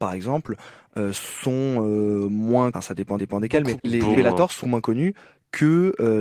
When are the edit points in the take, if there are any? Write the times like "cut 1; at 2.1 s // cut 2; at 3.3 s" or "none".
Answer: cut 1; at 2.7 s // cut 2; at 3.2 s // cut 3; at 3.8 s // cut 4; at 4.1 s // cut 5; at 4.6 s